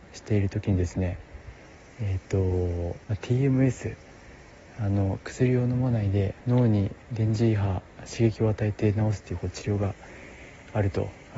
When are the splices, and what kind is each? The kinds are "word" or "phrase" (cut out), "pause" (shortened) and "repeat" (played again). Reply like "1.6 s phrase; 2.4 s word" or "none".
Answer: 3.0 s pause; 6.4 s pause; 7.0 s pause